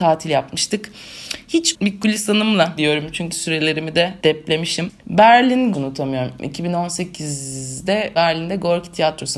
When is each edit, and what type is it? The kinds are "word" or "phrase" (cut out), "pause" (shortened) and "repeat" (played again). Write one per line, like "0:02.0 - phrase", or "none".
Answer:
0:01.7 - word
0:02.8 - word
0:03.3 - word
0:04.2 - pause
0:05.7 - phrase